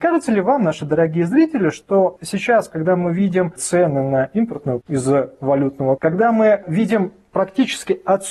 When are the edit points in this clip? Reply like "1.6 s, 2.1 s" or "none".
2.2 s, 3.6 s, 4.8 s, 6.0 s

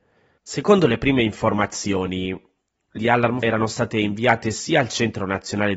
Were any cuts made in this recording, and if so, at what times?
3.0 s, 3.4 s

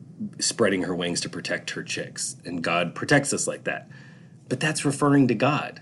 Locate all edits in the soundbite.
none

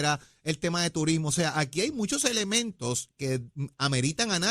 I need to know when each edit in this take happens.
none

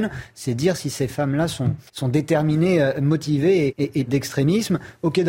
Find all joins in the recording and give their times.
1.9 s, 3.7 s, 4.1 s

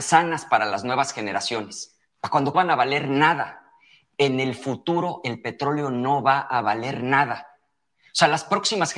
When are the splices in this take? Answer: 2.1 s, 2.5 s

